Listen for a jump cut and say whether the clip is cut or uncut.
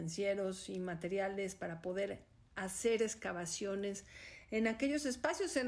uncut